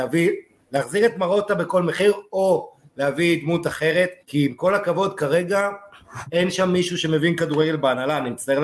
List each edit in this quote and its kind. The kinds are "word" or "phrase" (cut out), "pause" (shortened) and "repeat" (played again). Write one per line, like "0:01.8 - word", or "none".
0:04.2 - pause